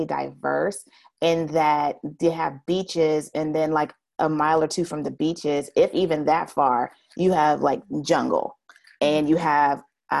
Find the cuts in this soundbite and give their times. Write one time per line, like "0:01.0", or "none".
none